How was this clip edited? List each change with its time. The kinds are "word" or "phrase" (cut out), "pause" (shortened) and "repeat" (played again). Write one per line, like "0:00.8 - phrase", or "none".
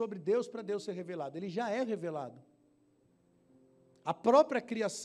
none